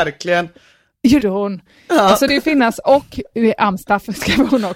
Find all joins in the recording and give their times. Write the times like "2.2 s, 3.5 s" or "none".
1.2 s, 2.3 s